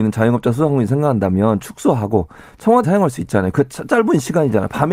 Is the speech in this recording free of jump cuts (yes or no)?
no